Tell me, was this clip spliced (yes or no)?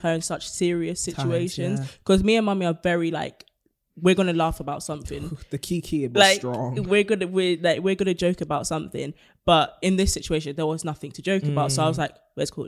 no